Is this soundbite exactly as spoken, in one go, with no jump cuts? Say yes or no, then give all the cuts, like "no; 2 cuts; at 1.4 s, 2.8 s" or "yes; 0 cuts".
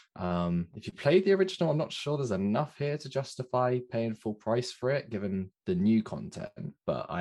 yes; 0 cuts